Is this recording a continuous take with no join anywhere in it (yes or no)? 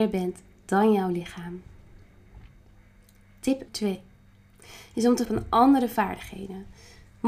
no